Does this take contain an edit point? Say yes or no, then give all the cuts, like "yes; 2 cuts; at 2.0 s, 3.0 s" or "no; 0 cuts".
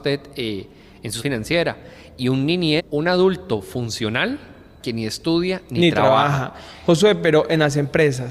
yes; 2 cuts; at 1.2 s, 2.8 s